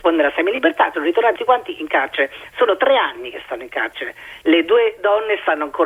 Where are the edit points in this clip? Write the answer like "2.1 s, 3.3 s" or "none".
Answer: 0.9 s, 1.4 s